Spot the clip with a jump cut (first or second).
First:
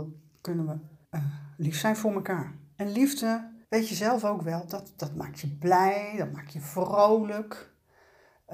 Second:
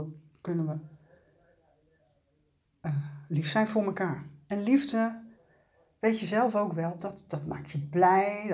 first